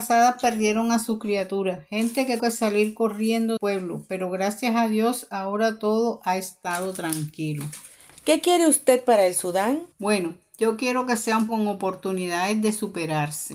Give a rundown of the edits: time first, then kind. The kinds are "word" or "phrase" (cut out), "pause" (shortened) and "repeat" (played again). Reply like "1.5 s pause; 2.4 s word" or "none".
2.4 s word; 3.6 s word; 9.9 s pause; 11.5 s word